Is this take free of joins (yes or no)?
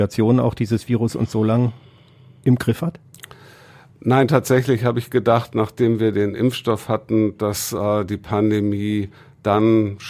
yes